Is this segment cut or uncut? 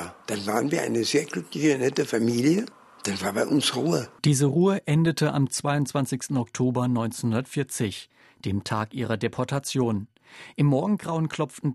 uncut